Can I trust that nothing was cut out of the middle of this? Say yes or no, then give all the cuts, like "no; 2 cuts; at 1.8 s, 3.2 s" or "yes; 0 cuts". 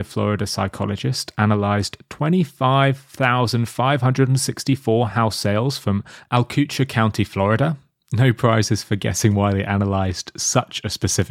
yes; 0 cuts